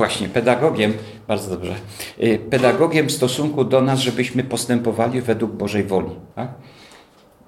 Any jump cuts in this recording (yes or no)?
yes